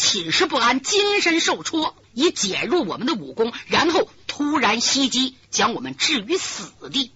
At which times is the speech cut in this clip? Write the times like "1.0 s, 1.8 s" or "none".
2.0 s